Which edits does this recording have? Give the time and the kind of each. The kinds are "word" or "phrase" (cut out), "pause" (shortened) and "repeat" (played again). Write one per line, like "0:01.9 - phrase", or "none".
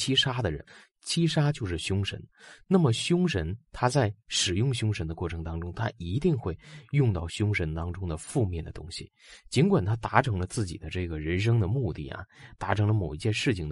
none